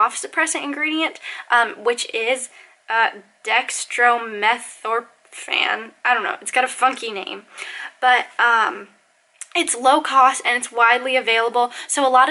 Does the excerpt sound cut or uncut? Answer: uncut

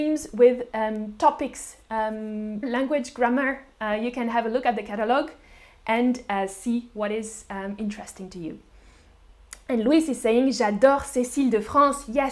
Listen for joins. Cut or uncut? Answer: cut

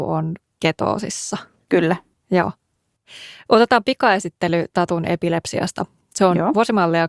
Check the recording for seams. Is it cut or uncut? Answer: uncut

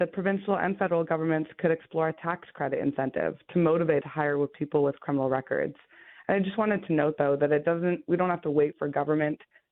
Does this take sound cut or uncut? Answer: cut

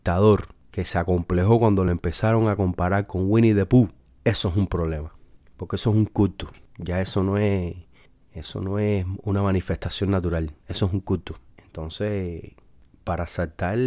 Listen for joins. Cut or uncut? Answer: uncut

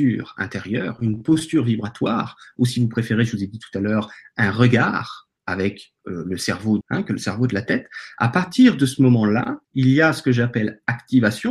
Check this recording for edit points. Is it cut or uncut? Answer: cut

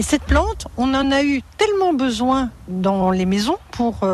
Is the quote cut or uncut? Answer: uncut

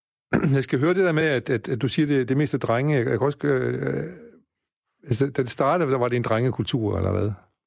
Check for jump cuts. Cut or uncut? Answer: uncut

